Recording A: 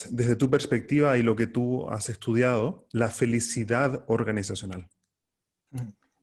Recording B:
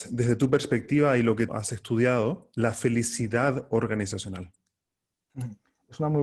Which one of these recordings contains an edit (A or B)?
B